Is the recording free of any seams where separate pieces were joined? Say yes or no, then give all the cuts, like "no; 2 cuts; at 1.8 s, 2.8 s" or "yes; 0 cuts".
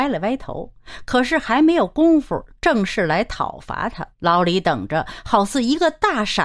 no; 1 cut; at 4.1 s